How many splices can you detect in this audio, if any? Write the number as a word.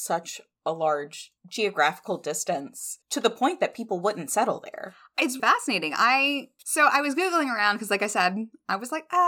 four